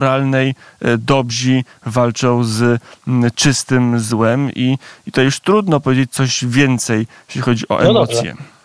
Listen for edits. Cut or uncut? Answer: uncut